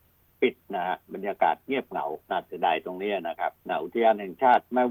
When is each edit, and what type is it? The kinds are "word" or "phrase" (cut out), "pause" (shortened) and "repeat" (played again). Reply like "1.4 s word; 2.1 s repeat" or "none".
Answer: 2.2 s pause; 3.6 s pause